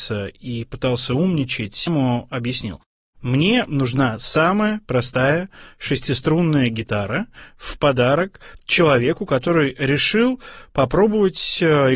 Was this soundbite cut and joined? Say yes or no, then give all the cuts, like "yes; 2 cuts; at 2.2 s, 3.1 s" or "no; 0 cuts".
yes; 1 cut; at 1.9 s